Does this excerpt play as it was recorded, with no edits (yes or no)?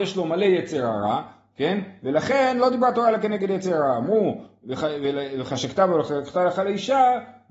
yes